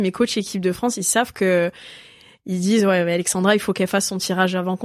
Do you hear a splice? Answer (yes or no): no